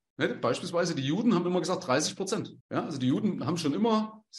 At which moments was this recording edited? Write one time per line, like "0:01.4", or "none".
0:02.6